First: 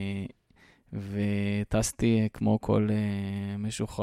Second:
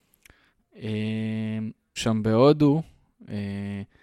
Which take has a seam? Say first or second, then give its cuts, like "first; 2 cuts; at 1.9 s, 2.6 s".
second; 1 cut; at 2.0 s